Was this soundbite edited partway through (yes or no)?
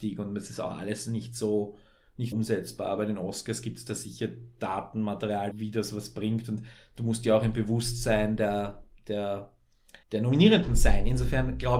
yes